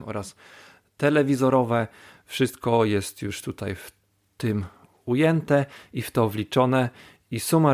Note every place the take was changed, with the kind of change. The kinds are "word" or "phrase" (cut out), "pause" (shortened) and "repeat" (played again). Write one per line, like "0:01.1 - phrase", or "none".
none